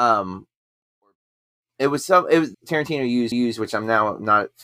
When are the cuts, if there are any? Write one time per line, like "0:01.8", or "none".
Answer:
0:02.5
0:03.3